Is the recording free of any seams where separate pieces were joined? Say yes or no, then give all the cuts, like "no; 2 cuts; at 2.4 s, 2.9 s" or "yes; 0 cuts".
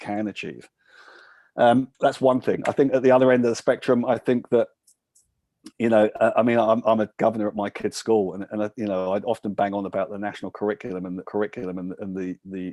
no; 2 cuts; at 1.9 s, 11.2 s